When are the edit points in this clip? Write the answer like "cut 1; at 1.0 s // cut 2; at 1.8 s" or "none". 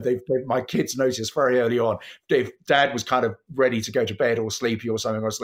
none